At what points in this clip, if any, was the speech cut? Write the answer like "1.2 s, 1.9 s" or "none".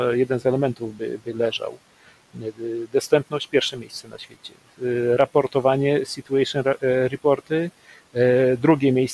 none